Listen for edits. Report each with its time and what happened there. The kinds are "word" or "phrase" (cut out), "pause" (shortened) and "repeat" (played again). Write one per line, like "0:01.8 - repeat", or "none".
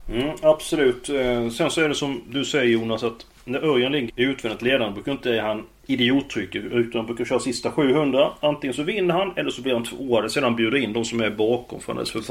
0:04.1 - word